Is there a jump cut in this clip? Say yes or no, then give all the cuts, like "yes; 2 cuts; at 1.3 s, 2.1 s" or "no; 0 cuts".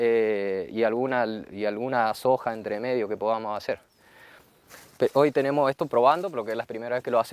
no; 0 cuts